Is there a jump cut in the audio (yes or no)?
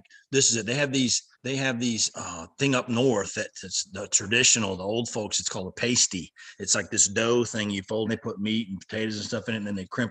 yes